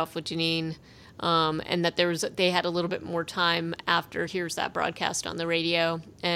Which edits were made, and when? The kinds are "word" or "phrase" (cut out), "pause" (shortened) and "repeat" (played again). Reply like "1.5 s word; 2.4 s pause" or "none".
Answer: 4.3 s word

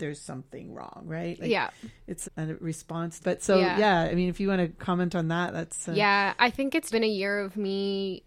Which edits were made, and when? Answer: 2.2 s word; 3.2 s word; 6.9 s word

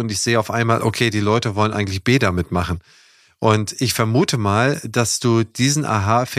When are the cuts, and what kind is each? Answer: none

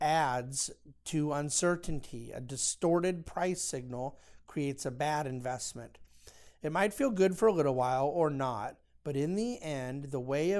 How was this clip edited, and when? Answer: none

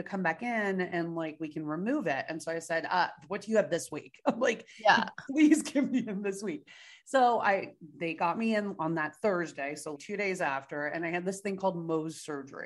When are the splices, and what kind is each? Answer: 10.0 s word

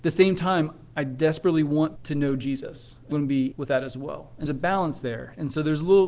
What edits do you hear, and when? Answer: 2.0 s word; 3.1 s word; 3.5 s word; 4.5 s word

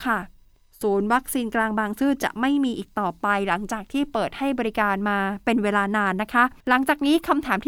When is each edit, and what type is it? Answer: 6.6 s pause

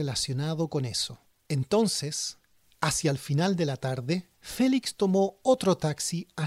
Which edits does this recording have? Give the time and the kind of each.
1.2 s pause; 4.3 s pause

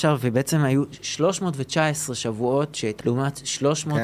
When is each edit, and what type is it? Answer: 3.0 s phrase

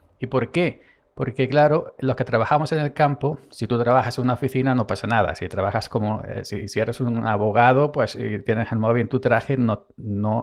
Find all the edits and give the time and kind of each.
none

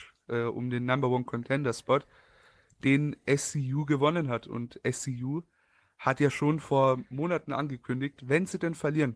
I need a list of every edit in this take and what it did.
none

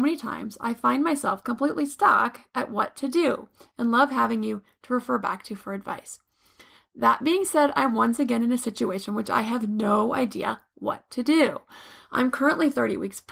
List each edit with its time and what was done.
none

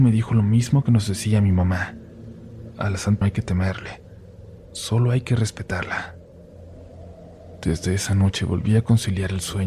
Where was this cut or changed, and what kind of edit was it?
3.2 s phrase

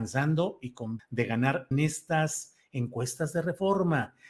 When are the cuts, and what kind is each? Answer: 1.0 s word; 1.7 s word

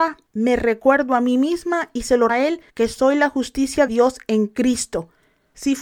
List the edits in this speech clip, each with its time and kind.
2.3 s word; 2.7 s pause; 3.9 s word

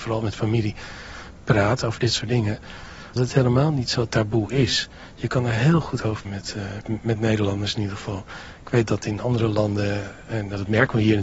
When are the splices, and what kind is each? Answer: 3.2 s word; 6.2 s word; 6.8 s word

